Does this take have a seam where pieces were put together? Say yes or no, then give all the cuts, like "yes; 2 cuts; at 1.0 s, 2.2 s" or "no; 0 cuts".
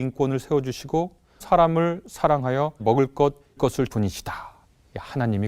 yes; 4 cuts; at 1.4 s, 2.8 s, 3.6 s, 3.9 s